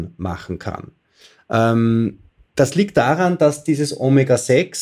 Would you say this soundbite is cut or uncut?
uncut